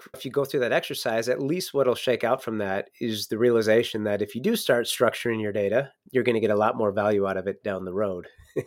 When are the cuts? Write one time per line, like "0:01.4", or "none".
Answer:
none